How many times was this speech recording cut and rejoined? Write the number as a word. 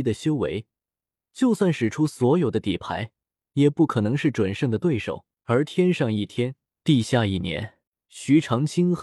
three